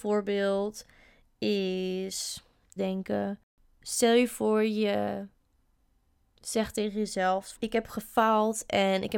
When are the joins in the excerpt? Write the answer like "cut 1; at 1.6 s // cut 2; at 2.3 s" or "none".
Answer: cut 1; at 2.8 s // cut 2; at 7.6 s